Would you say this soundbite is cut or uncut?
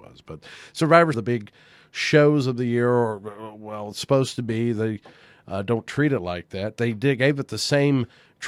cut